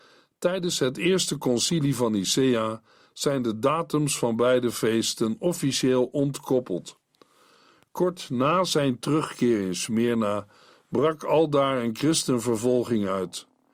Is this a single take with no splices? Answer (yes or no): yes